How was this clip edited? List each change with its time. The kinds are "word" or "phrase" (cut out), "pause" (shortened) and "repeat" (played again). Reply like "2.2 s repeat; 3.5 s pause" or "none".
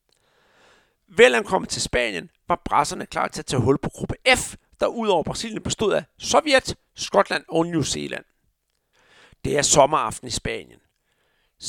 none